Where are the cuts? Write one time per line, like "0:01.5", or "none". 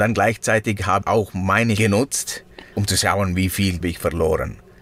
0:01.0
0:01.8
0:02.7
0:03.8